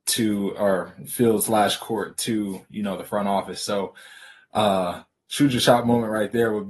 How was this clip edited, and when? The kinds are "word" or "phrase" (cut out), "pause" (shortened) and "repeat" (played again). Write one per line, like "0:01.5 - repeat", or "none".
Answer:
none